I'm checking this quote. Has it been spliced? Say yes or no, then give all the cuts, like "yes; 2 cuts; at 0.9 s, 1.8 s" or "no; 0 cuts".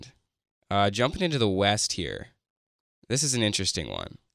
no; 0 cuts